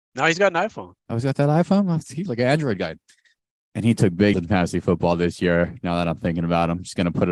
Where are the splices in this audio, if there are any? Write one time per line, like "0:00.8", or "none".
0:01.0
0:02.3
0:04.3